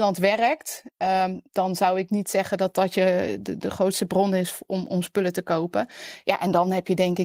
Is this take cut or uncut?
uncut